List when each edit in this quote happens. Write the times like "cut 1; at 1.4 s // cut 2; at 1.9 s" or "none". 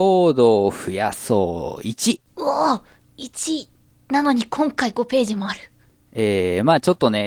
none